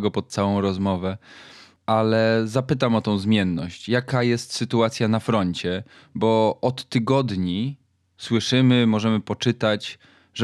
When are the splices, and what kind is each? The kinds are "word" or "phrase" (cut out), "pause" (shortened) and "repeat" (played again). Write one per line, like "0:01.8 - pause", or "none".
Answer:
none